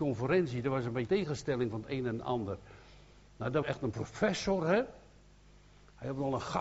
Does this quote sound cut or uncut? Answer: cut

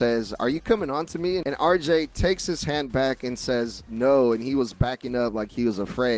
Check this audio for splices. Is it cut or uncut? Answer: uncut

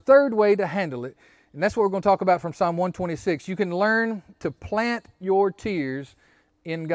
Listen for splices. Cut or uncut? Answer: uncut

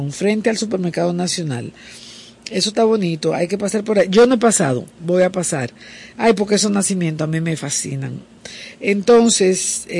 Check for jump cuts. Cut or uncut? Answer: uncut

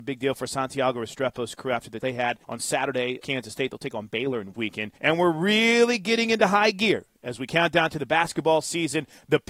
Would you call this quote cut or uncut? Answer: cut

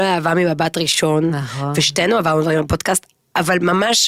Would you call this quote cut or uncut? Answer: uncut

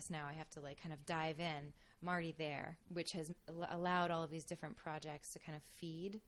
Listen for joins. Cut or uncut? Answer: uncut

